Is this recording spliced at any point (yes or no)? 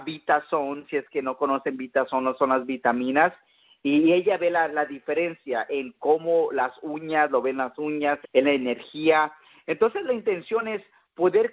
yes